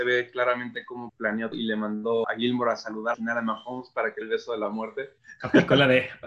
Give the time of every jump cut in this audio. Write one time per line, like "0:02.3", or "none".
0:01.1
0:01.5
0:02.2
0:03.1
0:04.2